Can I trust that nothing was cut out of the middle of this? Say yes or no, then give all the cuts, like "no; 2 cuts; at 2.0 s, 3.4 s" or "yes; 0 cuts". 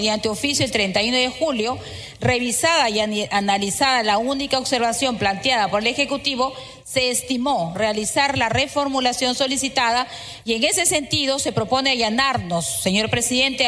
no; 1 cut; at 7.8 s